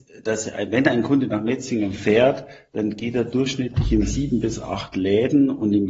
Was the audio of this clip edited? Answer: no; 0 cuts

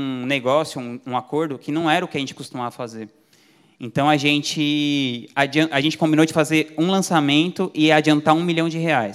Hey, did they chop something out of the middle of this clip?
no; 0 cuts

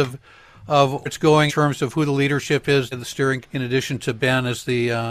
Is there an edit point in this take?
yes; 4 cuts; at 1.1 s, 1.5 s, 2.9 s, 3.4 s

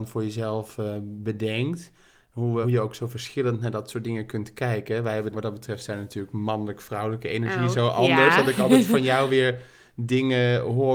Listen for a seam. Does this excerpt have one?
yes; 2 cuts; at 2.6 s, 5.3 s

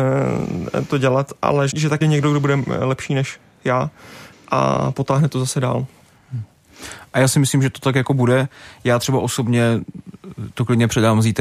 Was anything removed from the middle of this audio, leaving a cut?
yes; 3 cuts; at 1.7 s, 2.0 s, 4.3 s

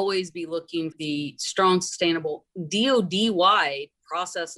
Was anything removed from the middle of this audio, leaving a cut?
yes; 1 cut; at 0.9 s

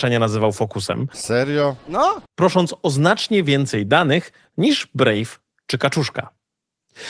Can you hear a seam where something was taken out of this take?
yes; 1 cut; at 2.3 s

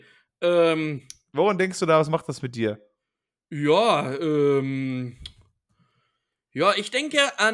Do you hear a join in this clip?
no; 0 cuts

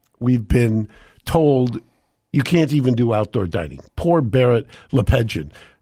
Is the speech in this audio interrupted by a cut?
no; 0 cuts

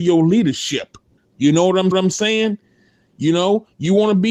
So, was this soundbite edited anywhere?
yes; 2 cuts; at 1.2 s, 1.9 s

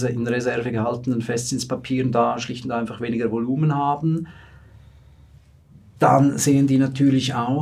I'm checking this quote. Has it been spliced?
no; 0 cuts

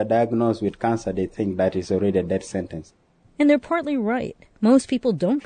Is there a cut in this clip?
no; 0 cuts

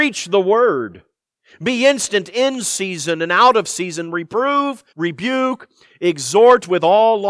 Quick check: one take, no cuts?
no; 1 cut; at 4.9 s

